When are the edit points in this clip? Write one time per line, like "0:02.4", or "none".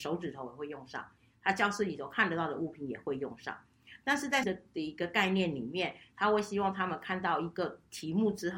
0:04.4